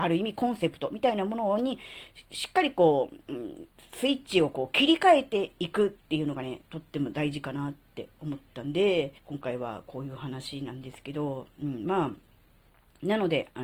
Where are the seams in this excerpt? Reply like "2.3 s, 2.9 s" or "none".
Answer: 6.7 s, 9.2 s